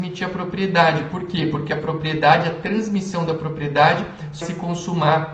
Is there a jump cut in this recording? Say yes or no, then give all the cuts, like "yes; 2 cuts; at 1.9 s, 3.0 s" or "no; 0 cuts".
yes; 1 cut; at 4.4 s